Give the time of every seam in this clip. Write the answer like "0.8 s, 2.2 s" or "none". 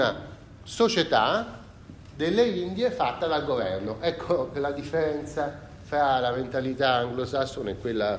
none